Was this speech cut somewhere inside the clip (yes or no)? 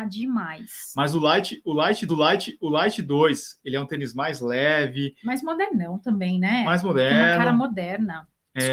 yes